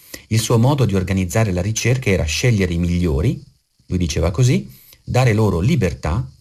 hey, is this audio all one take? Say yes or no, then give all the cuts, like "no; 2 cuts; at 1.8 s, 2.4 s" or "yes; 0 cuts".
yes; 0 cuts